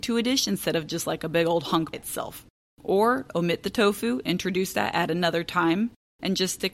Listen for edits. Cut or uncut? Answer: cut